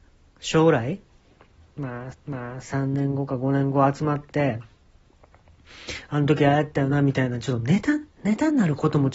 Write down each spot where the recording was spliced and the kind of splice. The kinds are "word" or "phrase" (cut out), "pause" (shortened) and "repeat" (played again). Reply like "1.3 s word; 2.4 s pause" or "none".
2.1 s repeat; 8.1 s pause